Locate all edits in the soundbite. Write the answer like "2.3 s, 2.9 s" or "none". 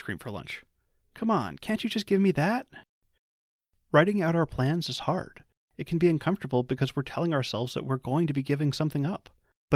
none

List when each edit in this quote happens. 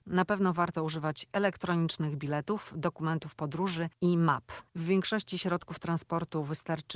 none

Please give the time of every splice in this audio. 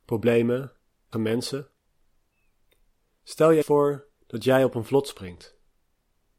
1.1 s, 3.6 s, 4.1 s

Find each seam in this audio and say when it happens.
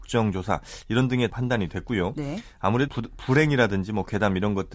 1.3 s, 2.9 s

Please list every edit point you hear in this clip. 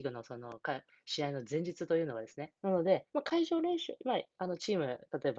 2.6 s, 3.1 s

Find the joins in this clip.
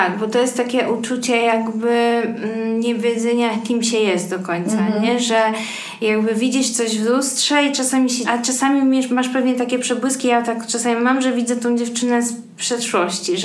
8.2 s

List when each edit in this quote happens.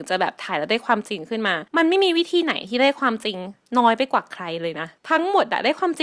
1.7 s, 5.0 s

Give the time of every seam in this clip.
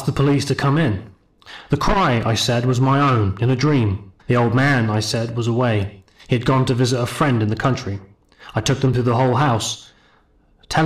4.2 s

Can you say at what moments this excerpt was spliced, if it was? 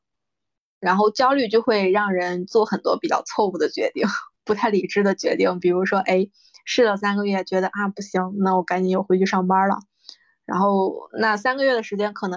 none

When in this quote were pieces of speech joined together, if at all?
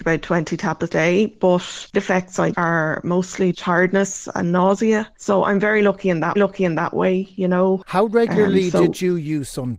0.9 s, 1.9 s, 2.5 s, 3.5 s, 6.4 s

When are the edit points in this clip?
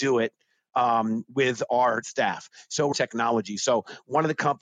2.0 s, 2.9 s

